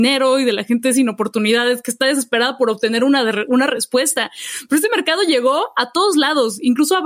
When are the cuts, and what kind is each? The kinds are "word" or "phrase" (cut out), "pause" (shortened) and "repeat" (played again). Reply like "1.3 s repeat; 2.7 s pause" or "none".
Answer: none